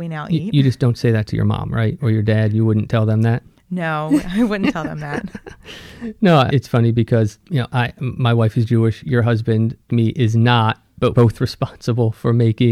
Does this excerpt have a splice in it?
yes; 4 cuts; at 6.5 s, 7.4 s, 9.9 s, 11.1 s

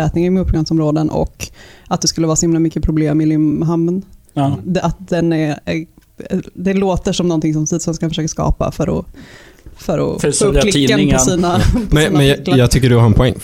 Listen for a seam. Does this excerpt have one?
no; 0 cuts

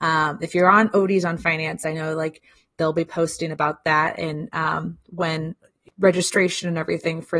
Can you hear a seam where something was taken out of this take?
no; 0 cuts

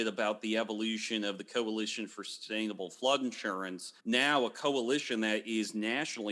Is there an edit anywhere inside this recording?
yes; 1 cut; at 4.0 s

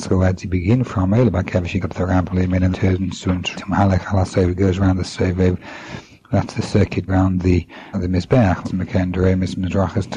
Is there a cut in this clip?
yes; 7 cuts; at 1.8 s, 2.3 s, 2.7 s, 3.5 s, 7.1 s, 7.9 s, 8.6 s

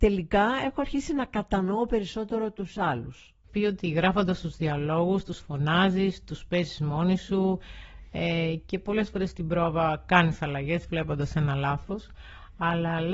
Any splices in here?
yes; 1 cut; at 3.5 s

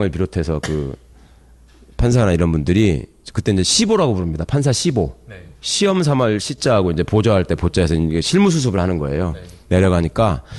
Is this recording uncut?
yes; 0 cuts

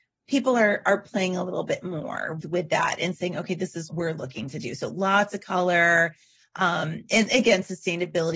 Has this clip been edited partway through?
yes; 2 cuts; at 2.4 s, 3.9 s

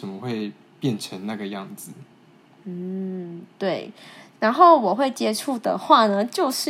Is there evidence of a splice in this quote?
no; 0 cuts

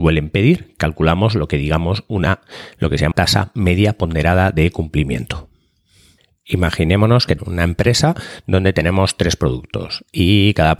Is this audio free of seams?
no; 2 cuts; at 3.1 s, 7.4 s

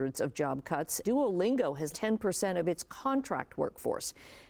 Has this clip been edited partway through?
yes; 2 cuts; at 1.0 s, 1.9 s

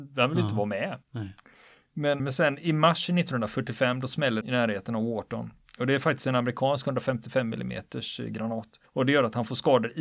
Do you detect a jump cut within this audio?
yes; 4 cuts; at 1.0 s, 2.2 s, 4.4 s, 8.8 s

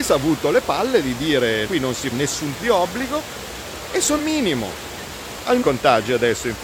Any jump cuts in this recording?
yes; 5 cuts; at 1.7 s, 2.1 s, 2.6 s, 4.2 s, 5.6 s

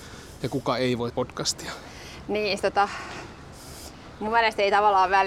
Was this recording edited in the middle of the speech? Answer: yes; 2 cuts; at 1.1 s, 2.6 s

